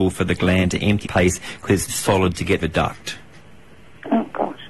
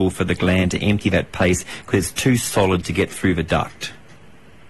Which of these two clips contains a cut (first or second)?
first